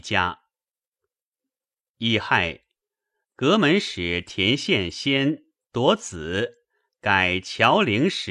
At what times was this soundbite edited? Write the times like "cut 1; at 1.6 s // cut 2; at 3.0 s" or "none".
none